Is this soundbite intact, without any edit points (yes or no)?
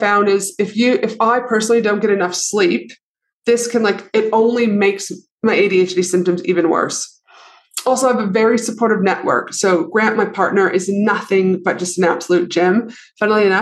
no